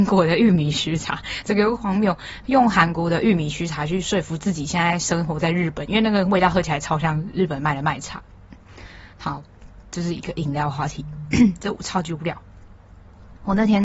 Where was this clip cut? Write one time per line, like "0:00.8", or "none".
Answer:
0:09.1